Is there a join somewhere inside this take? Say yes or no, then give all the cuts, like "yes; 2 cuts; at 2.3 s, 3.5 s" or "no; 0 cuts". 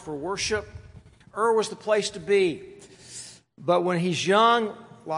no; 0 cuts